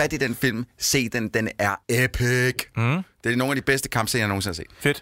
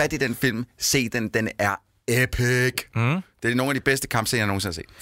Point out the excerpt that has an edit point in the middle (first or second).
first